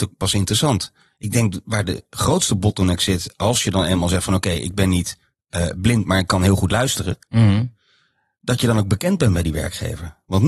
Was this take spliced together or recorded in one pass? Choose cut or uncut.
uncut